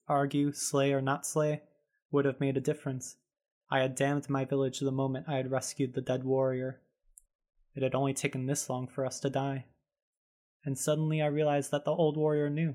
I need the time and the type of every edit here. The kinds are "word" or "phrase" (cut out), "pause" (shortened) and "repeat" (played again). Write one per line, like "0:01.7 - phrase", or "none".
none